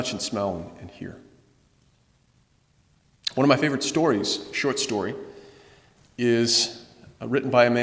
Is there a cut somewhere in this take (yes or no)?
no